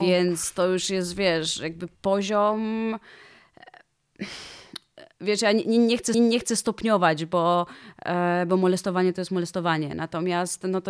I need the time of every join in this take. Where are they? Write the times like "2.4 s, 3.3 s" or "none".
1.9 s, 5.1 s, 6.1 s